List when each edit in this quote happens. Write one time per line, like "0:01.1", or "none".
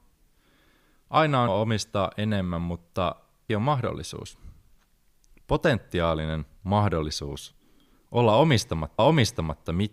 0:01.5
0:03.5
0:05.1
0:09.0